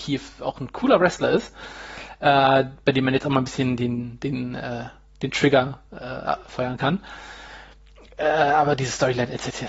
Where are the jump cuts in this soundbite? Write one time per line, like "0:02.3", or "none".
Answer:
none